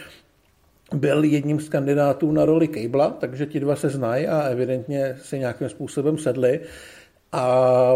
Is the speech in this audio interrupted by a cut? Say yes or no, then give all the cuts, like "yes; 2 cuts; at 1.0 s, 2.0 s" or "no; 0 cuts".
no; 0 cuts